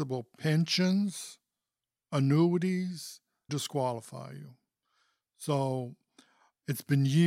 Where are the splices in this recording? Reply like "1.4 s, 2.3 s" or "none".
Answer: 3.5 s